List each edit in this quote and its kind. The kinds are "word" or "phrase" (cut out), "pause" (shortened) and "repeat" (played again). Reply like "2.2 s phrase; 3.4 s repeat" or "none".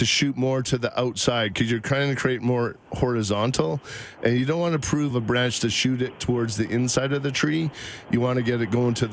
5.1 s phrase